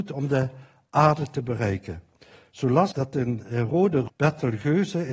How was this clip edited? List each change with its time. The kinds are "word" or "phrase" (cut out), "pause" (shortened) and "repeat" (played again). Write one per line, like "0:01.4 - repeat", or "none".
0:02.9 - word
0:04.1 - word